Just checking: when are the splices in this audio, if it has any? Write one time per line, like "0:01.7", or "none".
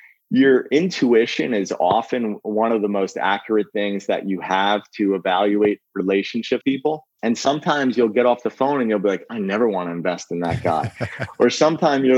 0:06.6